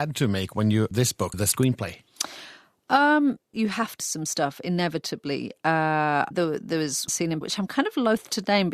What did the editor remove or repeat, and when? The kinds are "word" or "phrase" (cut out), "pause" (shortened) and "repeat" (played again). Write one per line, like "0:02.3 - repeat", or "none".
0:00.9 - word
0:01.3 - word
0:03.5 - word
0:04.0 - word
0:06.3 - word
0:07.1 - word
0:07.4 - word